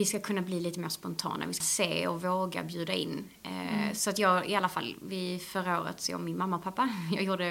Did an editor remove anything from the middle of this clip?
yes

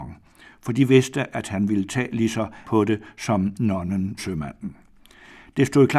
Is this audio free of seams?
no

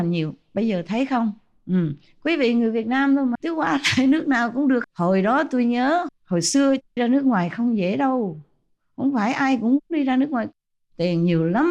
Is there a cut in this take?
yes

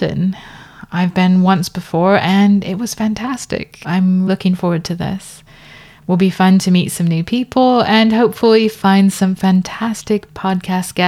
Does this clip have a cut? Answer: yes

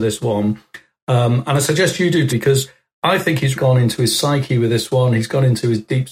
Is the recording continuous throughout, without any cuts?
no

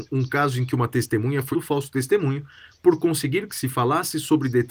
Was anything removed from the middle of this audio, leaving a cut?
yes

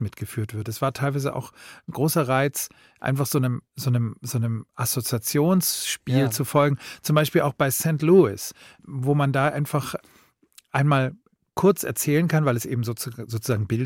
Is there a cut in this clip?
no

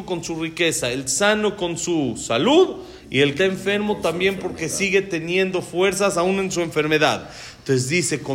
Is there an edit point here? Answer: yes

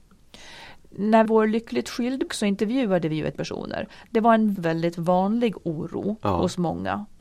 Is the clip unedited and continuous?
no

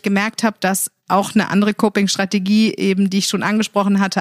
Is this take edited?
no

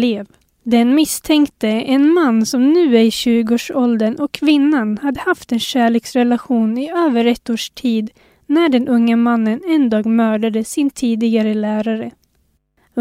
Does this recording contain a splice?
no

